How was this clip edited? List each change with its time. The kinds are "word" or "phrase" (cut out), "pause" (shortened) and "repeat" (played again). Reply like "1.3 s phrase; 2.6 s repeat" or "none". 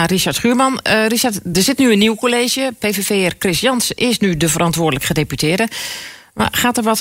none